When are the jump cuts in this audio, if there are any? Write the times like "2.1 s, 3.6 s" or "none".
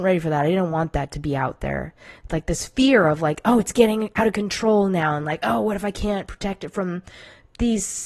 none